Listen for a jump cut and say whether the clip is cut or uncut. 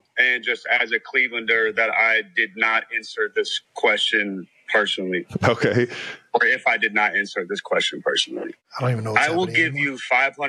cut